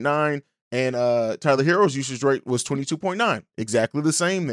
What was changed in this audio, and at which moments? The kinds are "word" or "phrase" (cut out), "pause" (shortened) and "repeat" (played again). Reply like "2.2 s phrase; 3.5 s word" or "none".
none